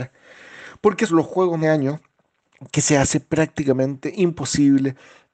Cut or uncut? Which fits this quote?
cut